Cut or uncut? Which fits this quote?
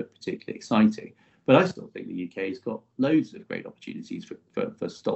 uncut